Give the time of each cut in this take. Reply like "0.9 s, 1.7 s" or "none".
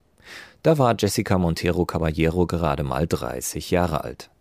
none